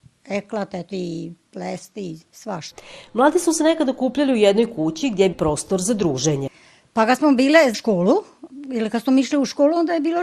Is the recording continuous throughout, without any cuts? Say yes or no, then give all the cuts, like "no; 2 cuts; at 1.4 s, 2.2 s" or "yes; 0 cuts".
no; 4 cuts; at 0.9 s, 2.3 s, 5.3 s, 7.7 s